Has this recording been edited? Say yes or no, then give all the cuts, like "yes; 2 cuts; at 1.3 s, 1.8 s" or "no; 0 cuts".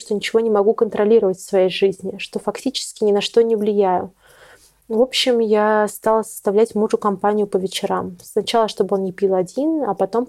no; 0 cuts